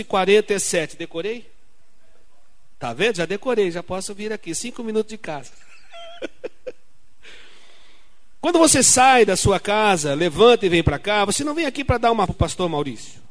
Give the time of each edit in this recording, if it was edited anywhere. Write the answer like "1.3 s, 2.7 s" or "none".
12.3 s

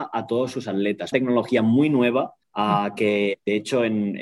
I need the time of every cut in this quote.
1.1 s, 2.4 s

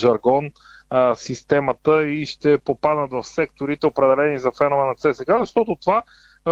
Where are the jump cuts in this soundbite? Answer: none

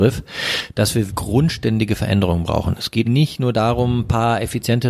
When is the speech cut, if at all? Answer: 1.1 s, 3.0 s

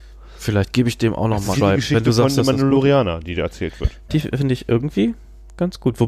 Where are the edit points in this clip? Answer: 1.5 s

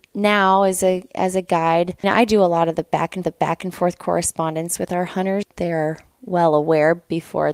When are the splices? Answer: 2.0 s, 3.2 s, 5.4 s

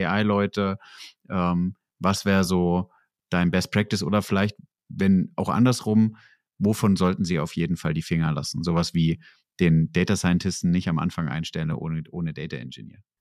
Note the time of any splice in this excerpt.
none

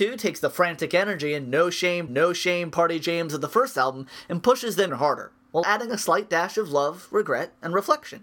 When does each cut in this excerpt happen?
2.1 s, 4.9 s, 5.6 s

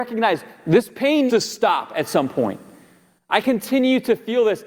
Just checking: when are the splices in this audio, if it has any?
1.3 s, 3.4 s

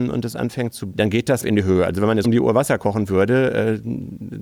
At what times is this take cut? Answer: 0.9 s, 1.4 s, 2.2 s

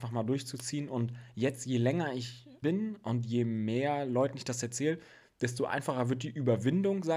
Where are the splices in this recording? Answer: 2.6 s

